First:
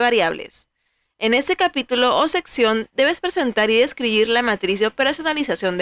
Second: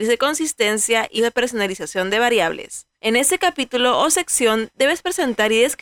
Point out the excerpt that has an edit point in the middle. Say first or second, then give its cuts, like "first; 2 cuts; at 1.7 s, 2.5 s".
second; 2 cuts; at 1.2 s, 2.9 s